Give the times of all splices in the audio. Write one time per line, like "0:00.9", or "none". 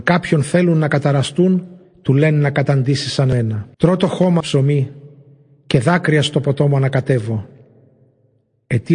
0:01.8
0:03.7
0:04.4